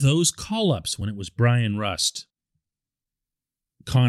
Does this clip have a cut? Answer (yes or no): no